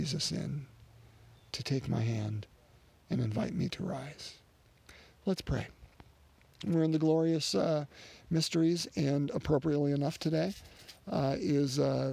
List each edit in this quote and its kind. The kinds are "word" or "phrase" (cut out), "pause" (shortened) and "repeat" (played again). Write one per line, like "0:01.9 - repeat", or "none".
0:01.5 - word